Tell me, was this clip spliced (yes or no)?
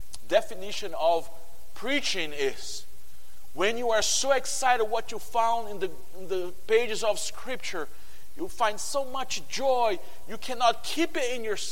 no